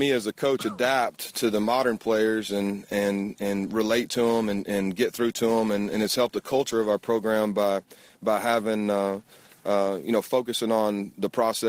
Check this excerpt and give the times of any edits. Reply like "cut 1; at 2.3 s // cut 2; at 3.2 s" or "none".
none